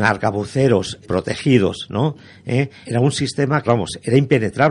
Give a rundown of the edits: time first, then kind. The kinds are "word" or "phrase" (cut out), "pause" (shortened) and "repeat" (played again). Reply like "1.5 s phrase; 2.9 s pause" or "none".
1.0 s word; 2.8 s word; 3.7 s word